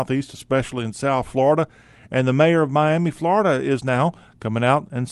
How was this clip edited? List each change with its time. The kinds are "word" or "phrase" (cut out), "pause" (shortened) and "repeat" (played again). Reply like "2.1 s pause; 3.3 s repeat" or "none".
none